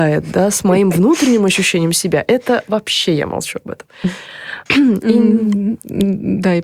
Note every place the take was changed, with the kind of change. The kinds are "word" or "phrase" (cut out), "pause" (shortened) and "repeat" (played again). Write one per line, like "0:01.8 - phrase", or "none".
0:04.7 - pause

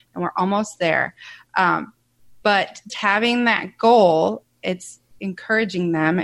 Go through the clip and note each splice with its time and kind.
0:02.9 - word

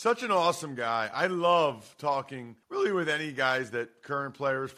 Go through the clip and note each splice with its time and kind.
0:02.6 - pause

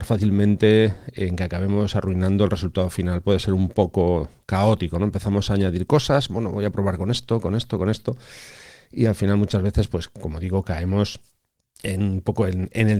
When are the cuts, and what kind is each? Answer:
none

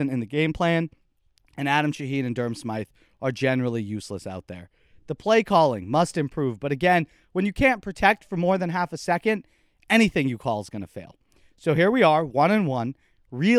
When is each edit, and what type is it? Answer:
none

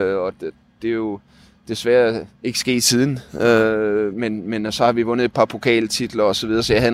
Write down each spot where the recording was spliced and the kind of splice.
0:02.3 - pause
0:04.1 - word

